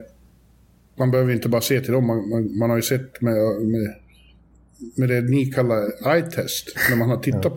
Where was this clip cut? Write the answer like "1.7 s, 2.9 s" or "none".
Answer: none